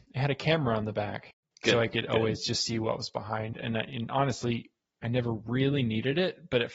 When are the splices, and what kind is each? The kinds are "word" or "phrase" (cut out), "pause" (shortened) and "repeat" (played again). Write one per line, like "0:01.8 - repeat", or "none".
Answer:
none